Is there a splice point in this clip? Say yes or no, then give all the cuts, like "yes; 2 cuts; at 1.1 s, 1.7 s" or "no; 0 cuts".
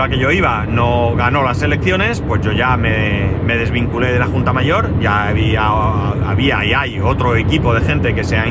no; 0 cuts